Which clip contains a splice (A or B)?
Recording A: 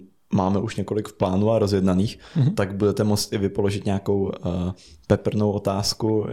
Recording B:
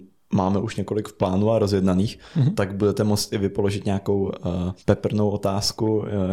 B